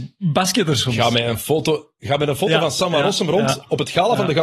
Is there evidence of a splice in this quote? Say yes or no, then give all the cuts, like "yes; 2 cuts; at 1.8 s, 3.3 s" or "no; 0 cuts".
no; 0 cuts